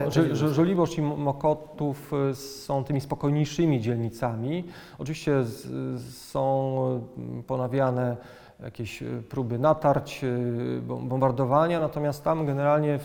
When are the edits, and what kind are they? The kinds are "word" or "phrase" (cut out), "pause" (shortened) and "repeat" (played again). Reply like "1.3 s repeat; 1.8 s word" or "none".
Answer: none